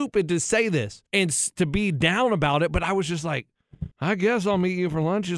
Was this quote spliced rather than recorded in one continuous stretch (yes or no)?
yes